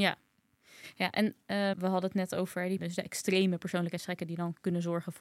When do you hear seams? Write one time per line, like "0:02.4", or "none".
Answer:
0:01.7
0:02.8